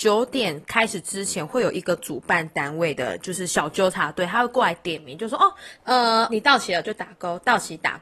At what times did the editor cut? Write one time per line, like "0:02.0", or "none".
0:06.3

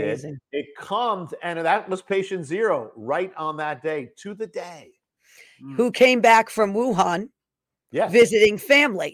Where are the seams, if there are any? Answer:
none

